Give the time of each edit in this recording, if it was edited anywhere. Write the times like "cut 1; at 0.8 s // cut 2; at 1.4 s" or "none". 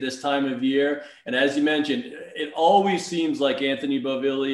none